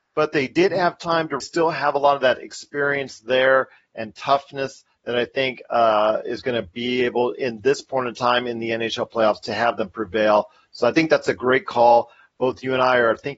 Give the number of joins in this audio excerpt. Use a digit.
1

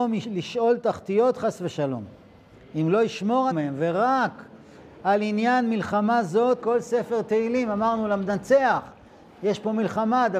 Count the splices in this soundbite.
2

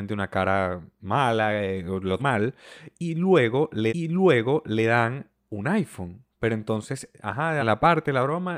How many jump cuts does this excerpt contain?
5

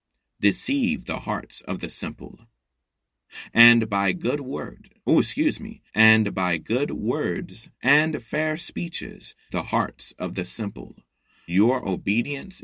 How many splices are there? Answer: 5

